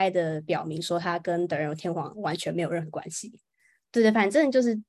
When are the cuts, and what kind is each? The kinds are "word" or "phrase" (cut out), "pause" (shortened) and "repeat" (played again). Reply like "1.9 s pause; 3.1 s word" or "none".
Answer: none